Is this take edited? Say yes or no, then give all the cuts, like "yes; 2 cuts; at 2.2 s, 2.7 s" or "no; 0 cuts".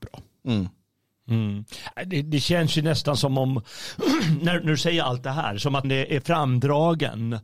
yes; 1 cut; at 5.8 s